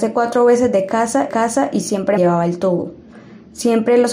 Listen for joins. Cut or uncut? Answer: cut